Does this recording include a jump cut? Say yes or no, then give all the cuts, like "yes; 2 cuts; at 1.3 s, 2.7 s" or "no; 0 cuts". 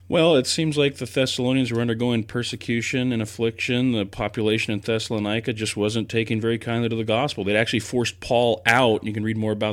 no; 0 cuts